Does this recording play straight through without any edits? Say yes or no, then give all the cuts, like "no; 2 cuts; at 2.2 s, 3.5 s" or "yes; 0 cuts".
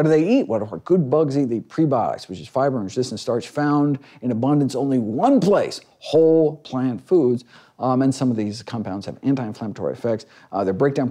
yes; 0 cuts